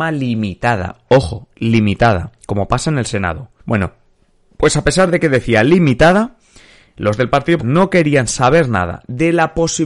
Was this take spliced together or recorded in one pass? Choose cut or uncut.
cut